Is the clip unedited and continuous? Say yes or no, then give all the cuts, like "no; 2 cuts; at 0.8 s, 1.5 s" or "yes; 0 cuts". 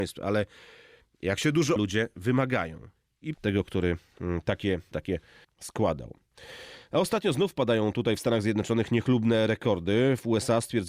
no; 4 cuts; at 1.8 s, 3.3 s, 4.9 s, 5.4 s